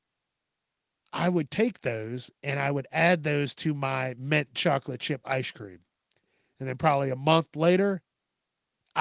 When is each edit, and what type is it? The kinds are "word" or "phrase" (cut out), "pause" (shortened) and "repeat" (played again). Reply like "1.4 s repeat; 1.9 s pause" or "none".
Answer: none